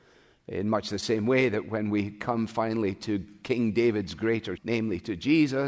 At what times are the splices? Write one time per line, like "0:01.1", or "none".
0:04.6